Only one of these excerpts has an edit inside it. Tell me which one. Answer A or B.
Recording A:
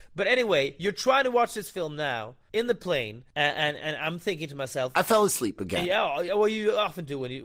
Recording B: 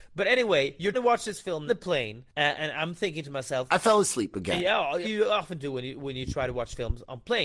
B